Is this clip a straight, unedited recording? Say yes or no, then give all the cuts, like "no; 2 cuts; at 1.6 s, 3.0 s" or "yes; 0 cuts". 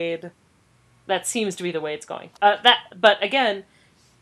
no; 1 cut; at 2.4 s